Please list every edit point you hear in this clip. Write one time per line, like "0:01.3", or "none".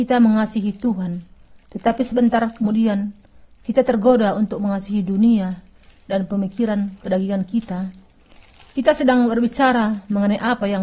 none